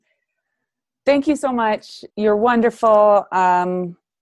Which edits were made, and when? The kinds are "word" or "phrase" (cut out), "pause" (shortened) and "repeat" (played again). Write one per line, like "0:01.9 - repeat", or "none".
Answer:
0:02.1 - pause